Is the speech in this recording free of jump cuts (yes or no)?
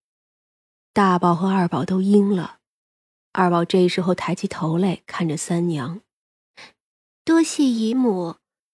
yes